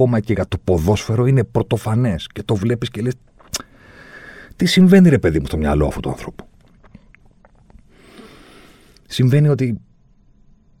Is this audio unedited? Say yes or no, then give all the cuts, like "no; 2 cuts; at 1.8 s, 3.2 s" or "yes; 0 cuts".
yes; 0 cuts